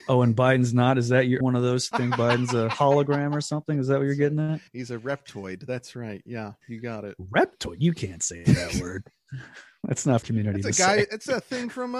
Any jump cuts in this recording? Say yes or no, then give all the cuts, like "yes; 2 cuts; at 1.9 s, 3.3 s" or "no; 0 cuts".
yes; 4 cuts; at 1.4 s, 1.9 s, 4.7 s, 10.2 s